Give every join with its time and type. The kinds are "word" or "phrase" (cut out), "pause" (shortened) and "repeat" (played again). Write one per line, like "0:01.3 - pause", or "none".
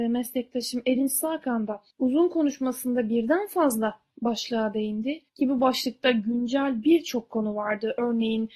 0:01.9 - pause
0:05.3 - pause